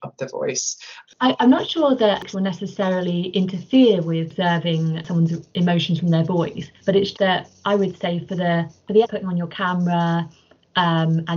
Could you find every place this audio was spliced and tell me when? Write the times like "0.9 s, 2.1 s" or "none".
1.1 s, 2.3 s, 6.7 s, 7.1 s, 9.0 s